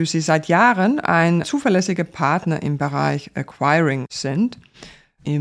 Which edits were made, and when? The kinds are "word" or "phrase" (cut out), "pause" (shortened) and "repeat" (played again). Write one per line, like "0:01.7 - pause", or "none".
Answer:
0:01.4 - word